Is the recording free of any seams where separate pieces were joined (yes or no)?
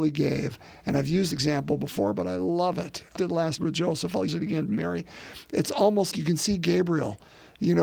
no